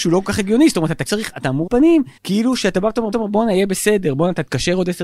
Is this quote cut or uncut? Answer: cut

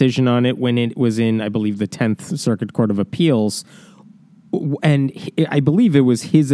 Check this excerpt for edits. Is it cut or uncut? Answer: uncut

